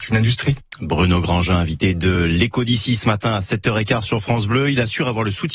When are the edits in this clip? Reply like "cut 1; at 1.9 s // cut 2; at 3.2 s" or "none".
none